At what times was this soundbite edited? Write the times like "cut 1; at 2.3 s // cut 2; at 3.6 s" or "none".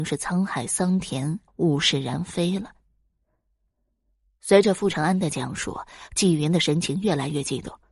cut 1; at 1.5 s